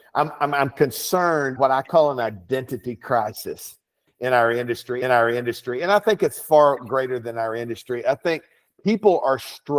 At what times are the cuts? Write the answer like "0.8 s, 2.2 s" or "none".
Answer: 1.6 s, 5.0 s

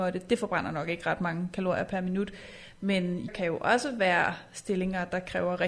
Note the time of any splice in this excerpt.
3.3 s

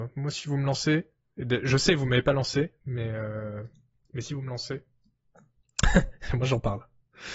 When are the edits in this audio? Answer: none

